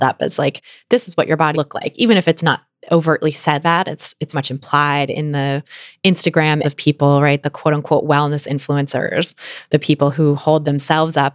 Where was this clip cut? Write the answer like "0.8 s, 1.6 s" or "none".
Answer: 1.5 s, 3.6 s, 4.3 s, 6.6 s